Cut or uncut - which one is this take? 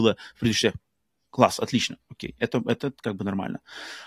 uncut